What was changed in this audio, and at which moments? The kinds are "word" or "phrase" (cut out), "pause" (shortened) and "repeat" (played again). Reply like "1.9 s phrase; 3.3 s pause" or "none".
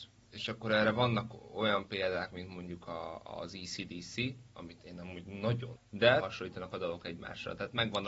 5.8 s word; 6.2 s word